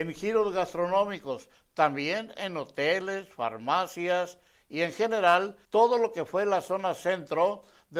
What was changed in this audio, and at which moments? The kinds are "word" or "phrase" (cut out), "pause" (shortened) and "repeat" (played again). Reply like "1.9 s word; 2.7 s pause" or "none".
5.6 s pause